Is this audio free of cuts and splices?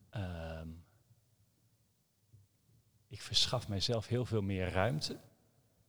yes; 0 cuts

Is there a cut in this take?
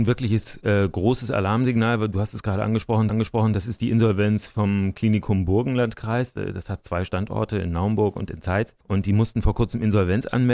yes; 2 cuts; at 3.1 s, 8.8 s

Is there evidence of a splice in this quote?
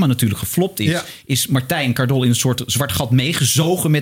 no; 0 cuts

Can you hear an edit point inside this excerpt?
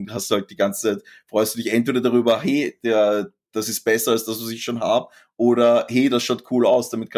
no; 0 cuts

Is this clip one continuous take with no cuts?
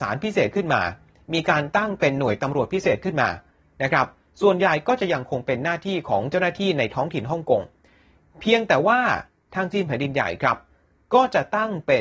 yes; 0 cuts

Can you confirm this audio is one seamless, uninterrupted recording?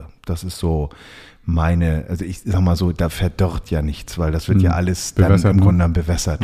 yes; 0 cuts

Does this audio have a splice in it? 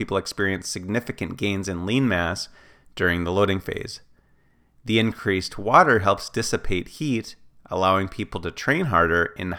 no; 0 cuts

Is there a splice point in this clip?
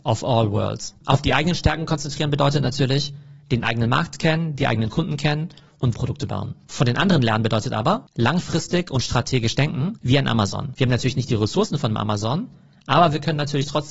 yes; 1 cut; at 5.9 s

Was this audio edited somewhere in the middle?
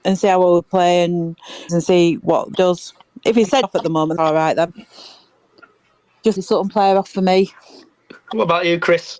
yes; 5 cuts; at 1.7 s, 2.5 s, 3.6 s, 4.2 s, 6.4 s

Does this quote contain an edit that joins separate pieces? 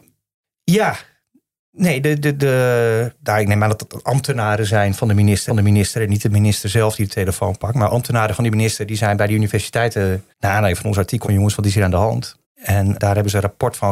yes; 5 cuts; at 2.2 s, 5.5 s, 10.3 s, 11.2 s, 12.4 s

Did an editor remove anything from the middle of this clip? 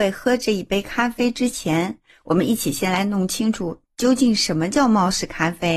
no; 0 cuts

